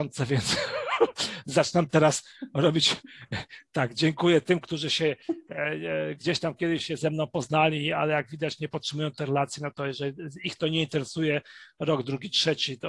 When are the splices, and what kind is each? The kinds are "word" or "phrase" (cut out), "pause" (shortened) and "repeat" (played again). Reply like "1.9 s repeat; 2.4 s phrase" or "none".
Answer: 6.8 s word